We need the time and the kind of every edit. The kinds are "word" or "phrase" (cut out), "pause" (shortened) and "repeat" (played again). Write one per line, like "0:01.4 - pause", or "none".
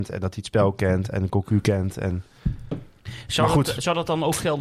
none